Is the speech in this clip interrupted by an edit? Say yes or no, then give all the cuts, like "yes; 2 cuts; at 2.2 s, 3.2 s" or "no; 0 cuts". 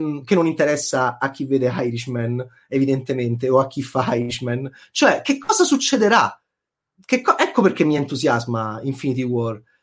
no; 0 cuts